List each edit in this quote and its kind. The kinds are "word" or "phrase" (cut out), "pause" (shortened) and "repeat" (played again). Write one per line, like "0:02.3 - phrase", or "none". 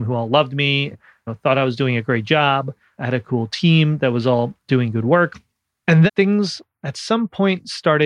0:00.9 - word
0:06.1 - word